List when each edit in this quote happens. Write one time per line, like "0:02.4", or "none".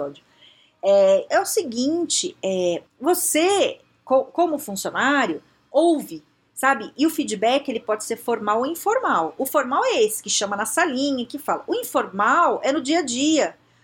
0:01.3
0:02.9